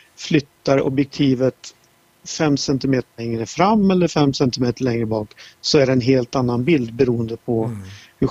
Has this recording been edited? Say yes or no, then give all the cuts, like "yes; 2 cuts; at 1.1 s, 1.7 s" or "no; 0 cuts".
no; 0 cuts